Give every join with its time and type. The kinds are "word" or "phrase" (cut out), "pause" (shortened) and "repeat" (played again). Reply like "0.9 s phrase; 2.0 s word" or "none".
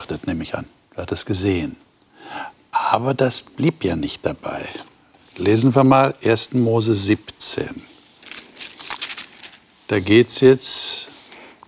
none